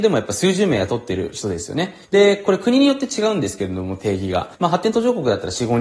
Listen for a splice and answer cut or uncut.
cut